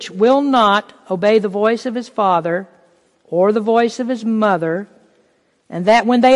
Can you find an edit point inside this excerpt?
no; 0 cuts

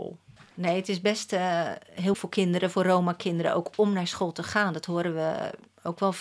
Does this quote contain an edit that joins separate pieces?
yes; 1 cut; at 2.1 s

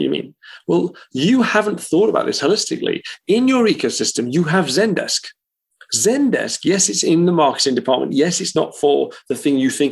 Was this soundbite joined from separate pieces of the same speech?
no; 0 cuts

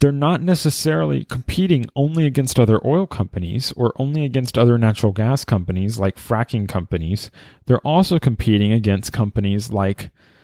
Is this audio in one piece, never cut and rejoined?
yes; 0 cuts

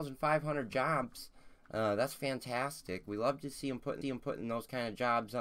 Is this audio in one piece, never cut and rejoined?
no; 1 cut; at 4.0 s

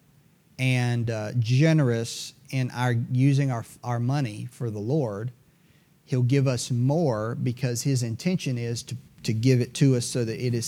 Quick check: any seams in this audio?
no; 0 cuts

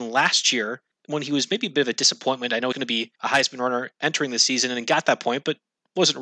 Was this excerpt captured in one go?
no; 2 cuts; at 2.7 s, 3.2 s

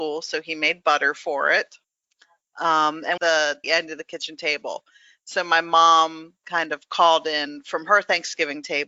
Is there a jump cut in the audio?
yes; 3 cuts; at 1.8 s, 3.2 s, 3.6 s

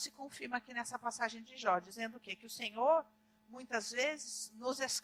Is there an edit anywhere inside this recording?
no; 0 cuts

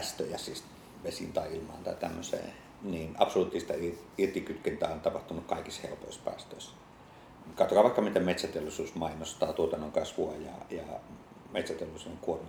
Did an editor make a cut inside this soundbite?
no; 0 cuts

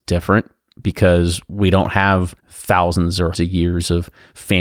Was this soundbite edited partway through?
yes; 2 cuts; at 2.4 s, 3.3 s

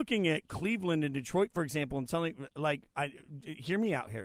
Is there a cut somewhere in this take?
no; 0 cuts

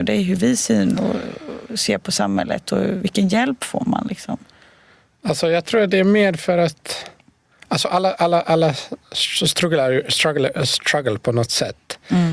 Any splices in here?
no; 0 cuts

